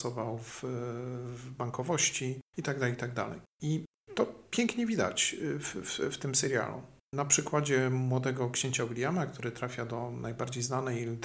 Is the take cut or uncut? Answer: uncut